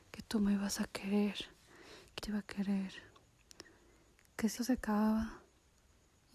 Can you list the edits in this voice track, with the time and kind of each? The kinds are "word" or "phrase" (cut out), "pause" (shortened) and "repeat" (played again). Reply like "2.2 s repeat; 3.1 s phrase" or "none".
2.2 s word; 4.6 s word